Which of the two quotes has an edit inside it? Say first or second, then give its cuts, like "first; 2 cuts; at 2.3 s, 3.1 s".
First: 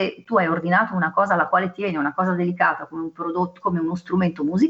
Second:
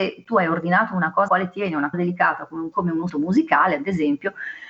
second; 4 cuts; at 1.3 s, 1.9 s, 2.7 s, 3.1 s